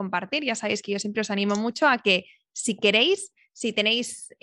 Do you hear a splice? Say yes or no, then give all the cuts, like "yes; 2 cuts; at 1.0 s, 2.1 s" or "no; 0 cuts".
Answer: no; 0 cuts